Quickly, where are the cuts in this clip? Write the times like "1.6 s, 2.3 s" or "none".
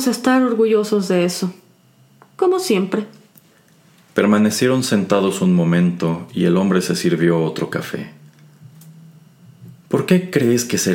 none